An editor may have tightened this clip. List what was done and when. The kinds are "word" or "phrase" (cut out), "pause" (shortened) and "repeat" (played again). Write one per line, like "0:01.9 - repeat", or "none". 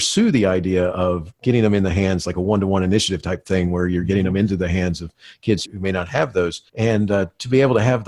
0:05.6 - word
0:06.7 - pause